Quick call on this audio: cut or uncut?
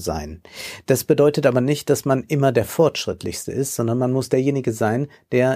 uncut